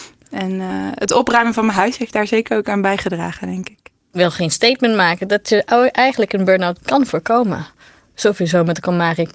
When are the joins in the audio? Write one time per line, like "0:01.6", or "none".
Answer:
none